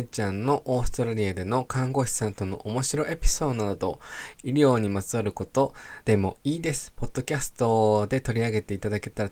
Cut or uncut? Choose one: cut